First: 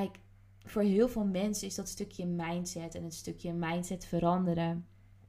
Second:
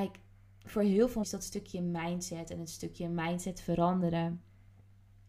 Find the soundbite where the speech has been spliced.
second; 1 cut; at 1.2 s

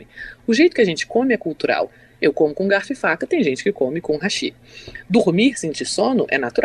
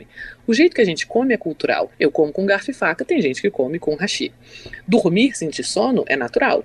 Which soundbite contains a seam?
second; 1 cut; at 1.9 s

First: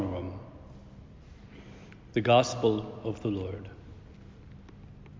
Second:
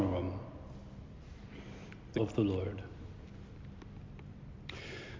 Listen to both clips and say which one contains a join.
second; 1 cut; at 2.1 s

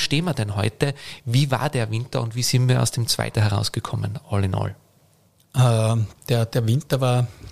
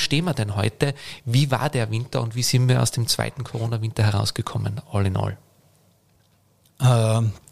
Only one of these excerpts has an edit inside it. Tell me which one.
first; 2 cuts; at 3.3 s, 5.3 s

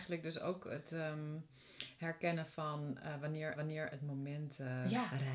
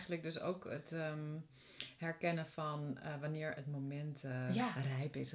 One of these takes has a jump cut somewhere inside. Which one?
first; 1 cut; at 3.5 s

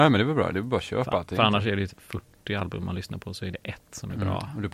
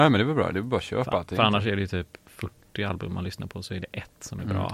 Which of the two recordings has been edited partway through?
first; 1 cut; at 1.9 s

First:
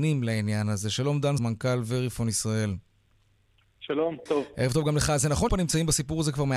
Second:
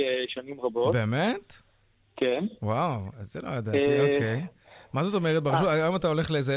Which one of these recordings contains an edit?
first; 3 cuts; at 1.4 s, 4.3 s, 5.5 s

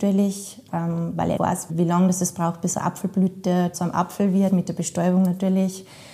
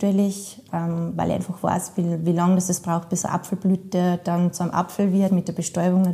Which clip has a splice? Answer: first; 3 cuts; at 1.4 s, 1.7 s, 3.7 s

